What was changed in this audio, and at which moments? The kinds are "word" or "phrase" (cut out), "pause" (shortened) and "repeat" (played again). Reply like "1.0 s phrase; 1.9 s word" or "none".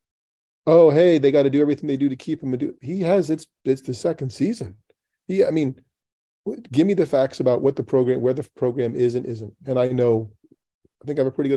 none